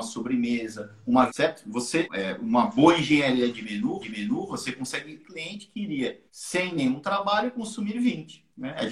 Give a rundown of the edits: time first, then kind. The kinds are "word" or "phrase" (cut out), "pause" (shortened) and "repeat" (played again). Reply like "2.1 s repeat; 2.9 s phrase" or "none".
1.3 s phrase; 2.1 s phrase; 4.0 s repeat; 5.2 s phrase; 6.3 s pause